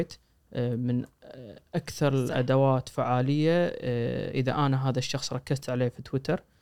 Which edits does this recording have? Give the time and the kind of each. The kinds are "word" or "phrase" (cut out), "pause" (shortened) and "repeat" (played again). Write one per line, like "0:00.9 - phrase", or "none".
none